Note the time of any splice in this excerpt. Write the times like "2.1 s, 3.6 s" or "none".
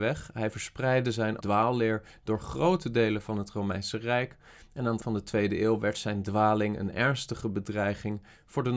1.4 s, 5.0 s